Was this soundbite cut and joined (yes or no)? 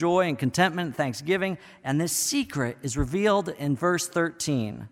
no